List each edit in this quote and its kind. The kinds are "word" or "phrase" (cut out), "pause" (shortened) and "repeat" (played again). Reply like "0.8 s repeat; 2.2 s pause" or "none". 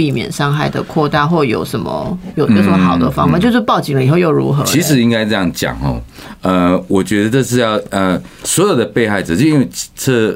none

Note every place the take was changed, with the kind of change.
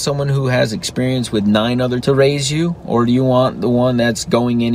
2.0 s word

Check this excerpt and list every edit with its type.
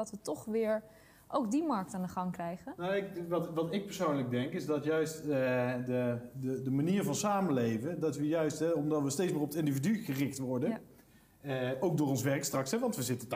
none

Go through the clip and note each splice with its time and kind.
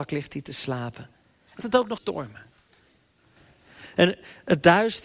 1.6 s word; 2.0 s word

